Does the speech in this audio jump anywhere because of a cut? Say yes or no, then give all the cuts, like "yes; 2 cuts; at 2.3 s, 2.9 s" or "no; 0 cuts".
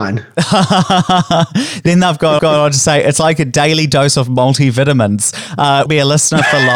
yes; 2 cuts; at 2.4 s, 5.9 s